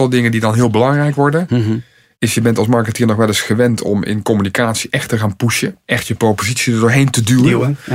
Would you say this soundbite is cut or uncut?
uncut